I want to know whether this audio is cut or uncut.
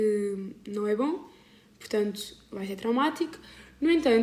uncut